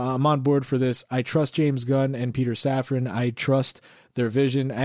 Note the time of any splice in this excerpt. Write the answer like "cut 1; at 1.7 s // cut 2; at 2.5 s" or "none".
none